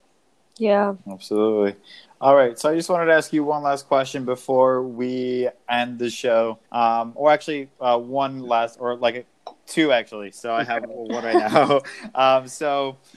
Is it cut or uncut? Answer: cut